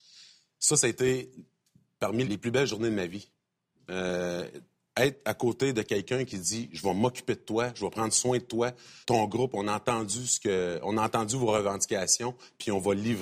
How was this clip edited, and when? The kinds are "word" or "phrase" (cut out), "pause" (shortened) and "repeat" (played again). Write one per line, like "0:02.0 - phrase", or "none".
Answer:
0:02.2 - word
0:09.0 - word